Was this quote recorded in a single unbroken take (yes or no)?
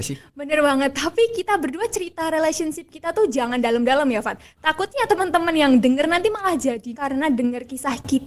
no